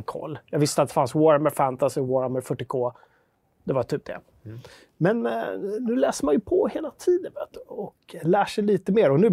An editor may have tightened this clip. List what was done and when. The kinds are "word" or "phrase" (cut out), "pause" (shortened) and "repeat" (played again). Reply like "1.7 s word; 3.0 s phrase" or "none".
none